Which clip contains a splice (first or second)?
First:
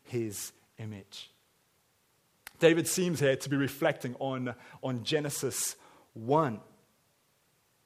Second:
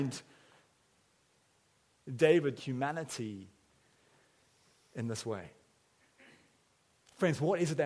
second